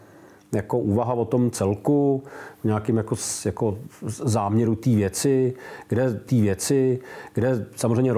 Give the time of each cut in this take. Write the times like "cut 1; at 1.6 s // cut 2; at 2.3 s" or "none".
cut 1; at 4.0 s // cut 2; at 6.3 s